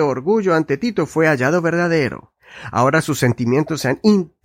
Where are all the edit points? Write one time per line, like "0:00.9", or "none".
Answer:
none